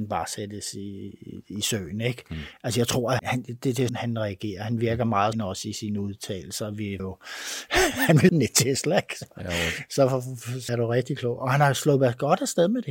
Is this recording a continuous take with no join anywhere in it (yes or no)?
no